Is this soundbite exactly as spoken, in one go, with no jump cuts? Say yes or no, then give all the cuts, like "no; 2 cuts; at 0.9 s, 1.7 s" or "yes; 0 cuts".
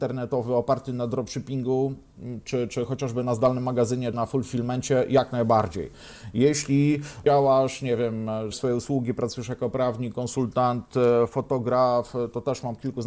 no; 4 cuts; at 2.7 s, 4.1 s, 7.3 s, 8.5 s